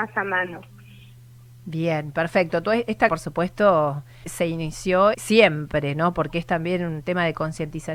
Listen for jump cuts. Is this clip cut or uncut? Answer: cut